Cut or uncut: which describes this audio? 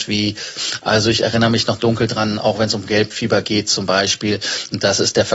uncut